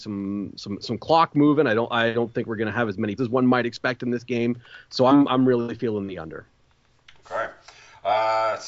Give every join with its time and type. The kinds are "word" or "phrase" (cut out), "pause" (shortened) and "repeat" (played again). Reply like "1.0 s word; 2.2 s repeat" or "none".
3.2 s word; 5.3 s word